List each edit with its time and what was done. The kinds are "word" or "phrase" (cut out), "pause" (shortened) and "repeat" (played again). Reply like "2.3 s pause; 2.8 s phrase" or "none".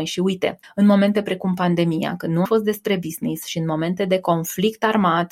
2.5 s word